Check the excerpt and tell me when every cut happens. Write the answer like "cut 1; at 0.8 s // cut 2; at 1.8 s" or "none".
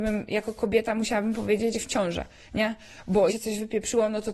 cut 1; at 1.7 s // cut 2; at 3.3 s